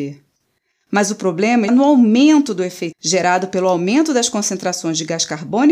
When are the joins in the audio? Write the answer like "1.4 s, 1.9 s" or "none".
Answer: 1.7 s, 2.9 s